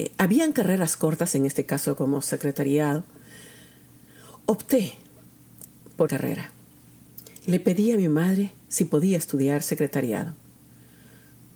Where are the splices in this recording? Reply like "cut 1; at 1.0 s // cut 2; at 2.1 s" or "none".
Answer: cut 1; at 6.1 s